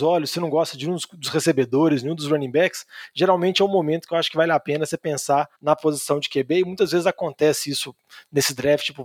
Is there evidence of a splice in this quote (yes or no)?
yes